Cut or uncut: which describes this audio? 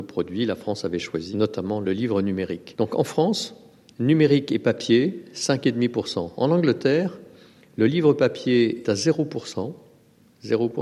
cut